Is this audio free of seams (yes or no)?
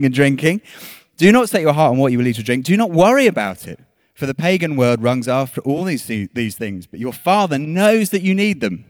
yes